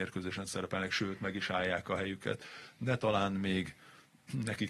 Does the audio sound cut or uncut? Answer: uncut